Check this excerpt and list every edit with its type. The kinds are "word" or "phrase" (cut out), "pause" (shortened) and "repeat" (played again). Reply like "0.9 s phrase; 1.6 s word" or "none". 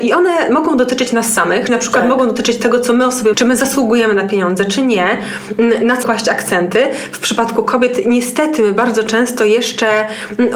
1.7 s word; 3.3 s word; 6.0 s word